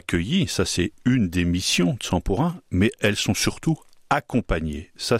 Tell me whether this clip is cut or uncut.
uncut